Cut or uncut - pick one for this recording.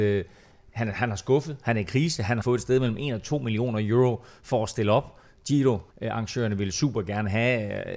cut